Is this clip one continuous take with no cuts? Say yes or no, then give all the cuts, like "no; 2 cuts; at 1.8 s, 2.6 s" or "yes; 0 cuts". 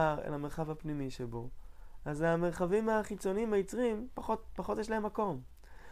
yes; 0 cuts